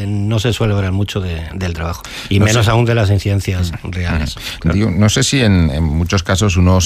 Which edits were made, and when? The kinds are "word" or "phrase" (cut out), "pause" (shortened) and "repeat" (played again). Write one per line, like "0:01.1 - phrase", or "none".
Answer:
none

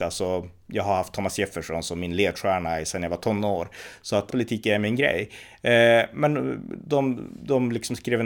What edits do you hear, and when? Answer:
0:04.3 - word

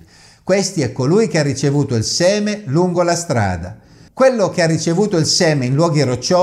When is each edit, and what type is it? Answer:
none

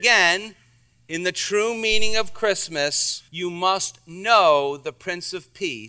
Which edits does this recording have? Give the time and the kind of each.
0:03.3 - pause

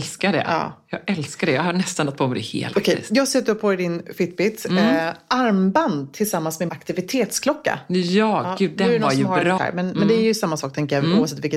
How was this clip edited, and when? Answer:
0:02.7 - word
0:06.7 - word
0:09.6 - phrase

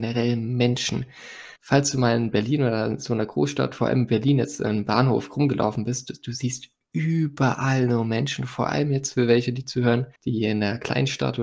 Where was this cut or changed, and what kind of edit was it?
0:01.6 - pause
0:10.2 - pause

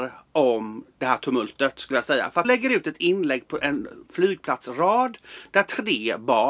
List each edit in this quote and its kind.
0:02.4 - word

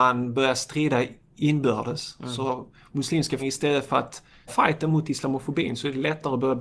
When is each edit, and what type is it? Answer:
0:03.4 - word
0:04.5 - word

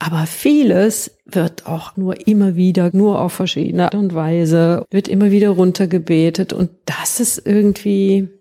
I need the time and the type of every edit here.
0:01.9 - word
0:02.9 - word
0:03.9 - word
0:04.8 - word

